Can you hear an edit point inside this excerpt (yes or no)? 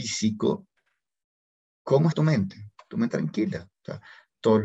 yes